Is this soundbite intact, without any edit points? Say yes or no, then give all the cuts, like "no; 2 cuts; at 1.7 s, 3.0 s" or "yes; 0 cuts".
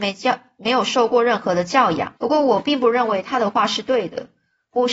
no; 1 cut; at 2.2 s